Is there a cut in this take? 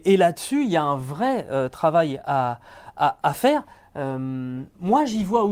no; 0 cuts

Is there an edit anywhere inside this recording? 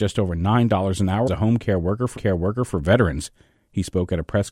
yes; 2 cuts; at 1.3 s, 2.2 s

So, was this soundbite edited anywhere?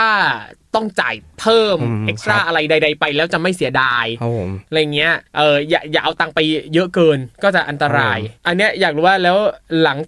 yes; 3 cuts; at 5.3 s, 7.3 s, 8.4 s

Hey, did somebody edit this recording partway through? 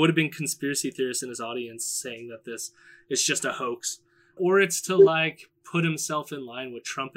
yes; 1 cut; at 4.4 s

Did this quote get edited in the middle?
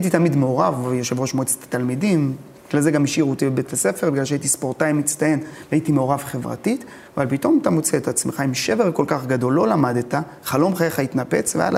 yes; 2 cuts; at 2.6 s, 7.1 s

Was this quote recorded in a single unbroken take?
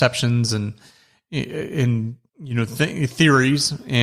no; 1 cut; at 2.3 s

